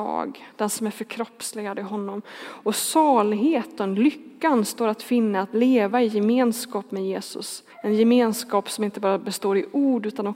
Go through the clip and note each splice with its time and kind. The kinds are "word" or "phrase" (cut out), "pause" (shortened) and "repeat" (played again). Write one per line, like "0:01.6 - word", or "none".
0:07.7 - pause